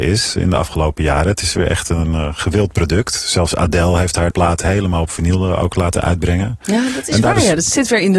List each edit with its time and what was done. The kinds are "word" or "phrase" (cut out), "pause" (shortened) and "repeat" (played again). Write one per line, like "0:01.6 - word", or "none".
0:04.3 - word